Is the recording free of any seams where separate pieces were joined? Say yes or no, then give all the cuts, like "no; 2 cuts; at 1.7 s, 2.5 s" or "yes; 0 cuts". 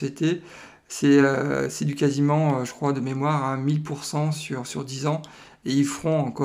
yes; 0 cuts